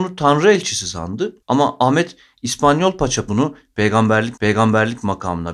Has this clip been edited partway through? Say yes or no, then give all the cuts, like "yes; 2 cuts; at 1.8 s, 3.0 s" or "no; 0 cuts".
yes; 3 cuts; at 1.4 s, 3.3 s, 4.4 s